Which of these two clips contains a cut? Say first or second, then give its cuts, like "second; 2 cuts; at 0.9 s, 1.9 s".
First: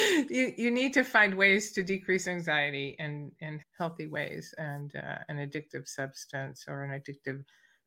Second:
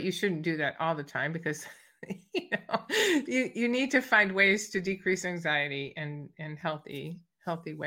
first; 1 cut; at 3.6 s